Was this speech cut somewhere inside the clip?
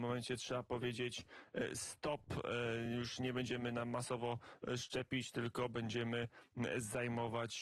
no; 0 cuts

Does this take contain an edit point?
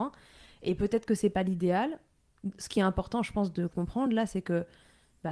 no; 0 cuts

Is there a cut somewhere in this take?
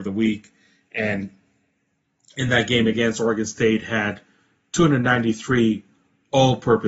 no; 0 cuts

